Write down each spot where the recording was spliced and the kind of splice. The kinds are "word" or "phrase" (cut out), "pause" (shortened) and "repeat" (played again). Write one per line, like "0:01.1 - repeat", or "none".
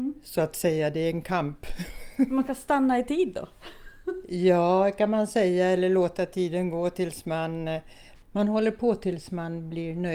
none